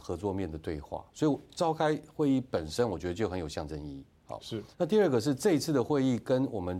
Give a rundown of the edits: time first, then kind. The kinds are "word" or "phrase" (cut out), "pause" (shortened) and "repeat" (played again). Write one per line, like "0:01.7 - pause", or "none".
0:04.7 - pause